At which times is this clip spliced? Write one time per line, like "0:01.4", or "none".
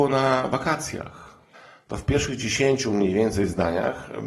none